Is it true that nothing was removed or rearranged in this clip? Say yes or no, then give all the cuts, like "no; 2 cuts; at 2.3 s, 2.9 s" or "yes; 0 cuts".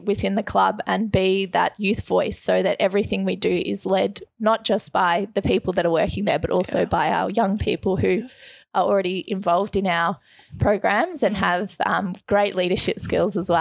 yes; 0 cuts